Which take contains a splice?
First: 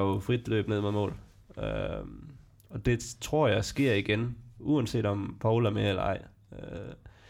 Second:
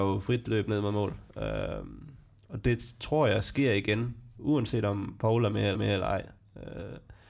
second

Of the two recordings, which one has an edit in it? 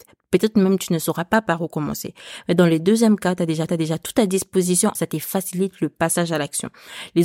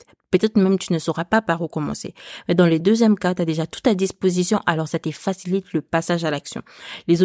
first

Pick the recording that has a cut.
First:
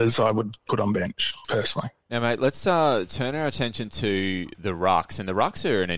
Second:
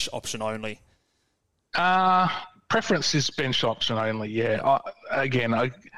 first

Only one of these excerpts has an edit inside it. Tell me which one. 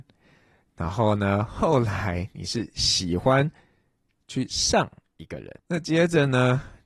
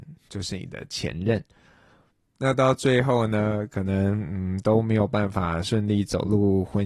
first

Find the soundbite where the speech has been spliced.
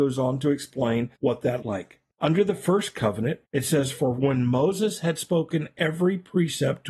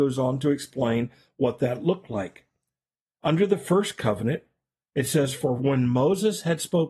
first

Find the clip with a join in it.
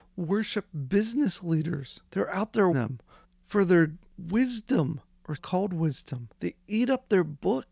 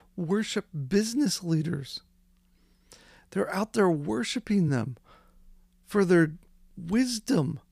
first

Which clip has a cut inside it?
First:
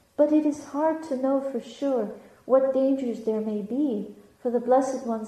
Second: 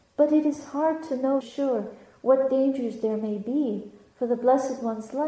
second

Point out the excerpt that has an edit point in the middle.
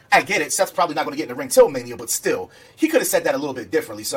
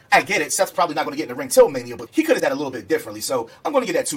second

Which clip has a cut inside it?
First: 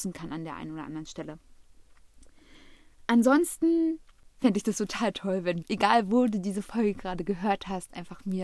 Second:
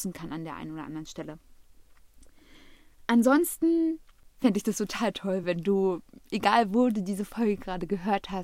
first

